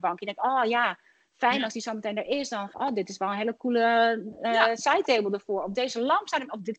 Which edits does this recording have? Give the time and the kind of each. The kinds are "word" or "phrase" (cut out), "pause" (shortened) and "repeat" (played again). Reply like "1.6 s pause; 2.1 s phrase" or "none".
2.7 s word